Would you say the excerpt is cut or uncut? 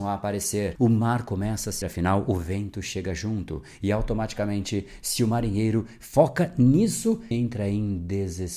cut